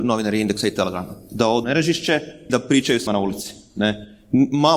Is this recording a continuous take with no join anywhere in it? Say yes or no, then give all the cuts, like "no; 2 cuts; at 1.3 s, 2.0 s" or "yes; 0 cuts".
no; 3 cuts; at 1.6 s, 2.5 s, 3.1 s